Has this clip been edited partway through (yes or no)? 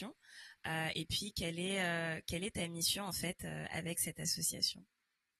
no